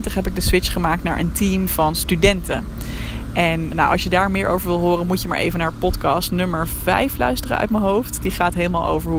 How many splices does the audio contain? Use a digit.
1